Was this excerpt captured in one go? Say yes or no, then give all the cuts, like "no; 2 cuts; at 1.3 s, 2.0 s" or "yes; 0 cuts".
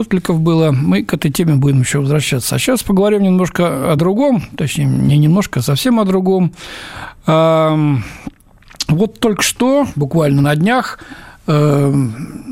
yes; 0 cuts